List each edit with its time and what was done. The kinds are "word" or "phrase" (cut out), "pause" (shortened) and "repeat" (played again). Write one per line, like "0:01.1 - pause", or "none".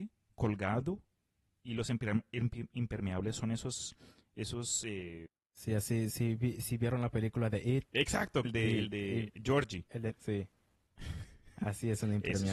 0:08.4 - word
0:10.1 - word